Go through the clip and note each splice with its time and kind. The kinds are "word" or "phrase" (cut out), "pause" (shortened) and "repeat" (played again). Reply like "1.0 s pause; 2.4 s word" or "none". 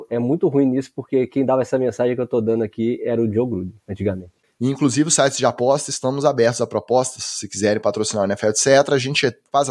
3.8 s pause